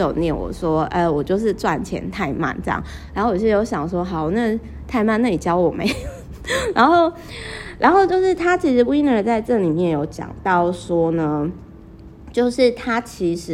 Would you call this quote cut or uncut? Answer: uncut